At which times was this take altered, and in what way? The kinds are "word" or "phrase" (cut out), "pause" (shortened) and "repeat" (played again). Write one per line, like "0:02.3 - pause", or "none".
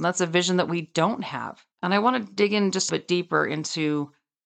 0:01.7 - pause
0:02.9 - phrase